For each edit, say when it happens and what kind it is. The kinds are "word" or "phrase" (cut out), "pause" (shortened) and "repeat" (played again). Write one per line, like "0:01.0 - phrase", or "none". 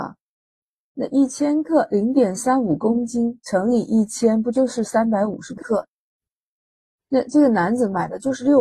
none